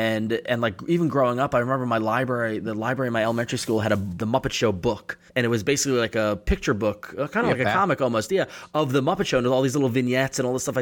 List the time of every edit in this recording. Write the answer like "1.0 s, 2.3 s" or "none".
5.3 s